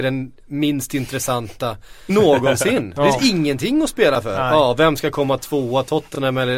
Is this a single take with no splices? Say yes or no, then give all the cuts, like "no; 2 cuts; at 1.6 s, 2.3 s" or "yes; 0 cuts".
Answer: no; 1 cut; at 2.1 s